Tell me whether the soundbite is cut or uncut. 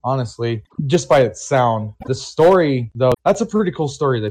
cut